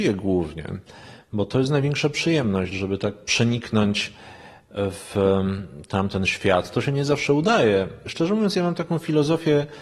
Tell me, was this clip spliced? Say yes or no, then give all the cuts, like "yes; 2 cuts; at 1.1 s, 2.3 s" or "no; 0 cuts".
no; 0 cuts